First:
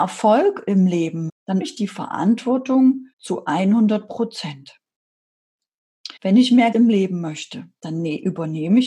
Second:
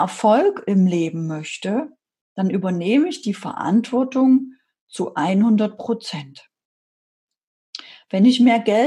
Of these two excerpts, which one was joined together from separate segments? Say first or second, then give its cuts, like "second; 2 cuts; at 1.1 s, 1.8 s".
first; 5 cuts; at 1.3 s, 1.6 s, 3.1 s, 6.2 s, 6.7 s